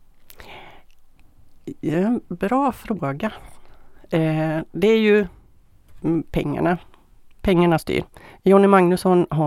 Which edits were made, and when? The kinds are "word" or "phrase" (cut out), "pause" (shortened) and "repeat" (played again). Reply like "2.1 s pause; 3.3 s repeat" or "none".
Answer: none